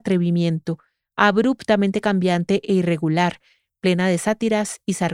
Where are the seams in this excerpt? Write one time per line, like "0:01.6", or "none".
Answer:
none

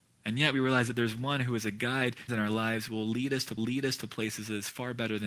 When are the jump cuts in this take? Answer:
0:02.3
0:03.6

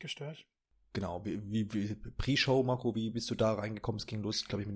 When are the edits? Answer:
none

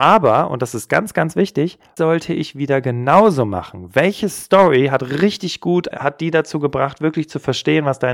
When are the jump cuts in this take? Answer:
0:02.0
0:05.9

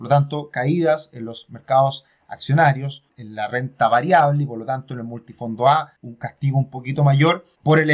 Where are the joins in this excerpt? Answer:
0:06.0

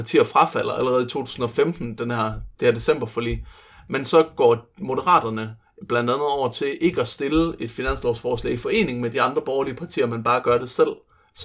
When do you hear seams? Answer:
none

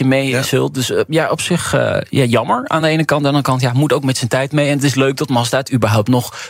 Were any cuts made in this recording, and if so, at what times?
none

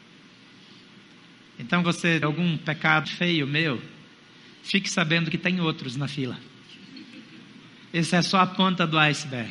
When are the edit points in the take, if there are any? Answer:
0:01.8
0:02.2
0:03.0

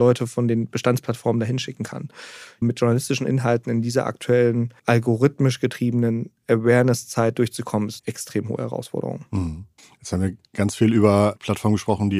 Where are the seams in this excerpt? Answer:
0:02.6
0:04.8
0:08.0
0:09.8

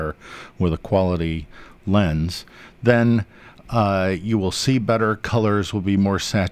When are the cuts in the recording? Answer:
none

